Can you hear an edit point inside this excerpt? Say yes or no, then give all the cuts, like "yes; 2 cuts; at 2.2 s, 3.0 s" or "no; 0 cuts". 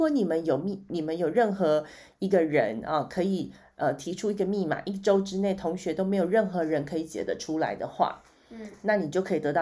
no; 0 cuts